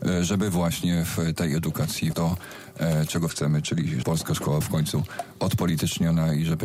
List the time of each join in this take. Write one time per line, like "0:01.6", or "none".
0:02.1
0:03.3
0:04.0
0:04.6